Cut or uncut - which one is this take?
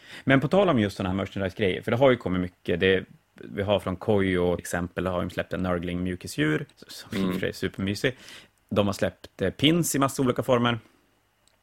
cut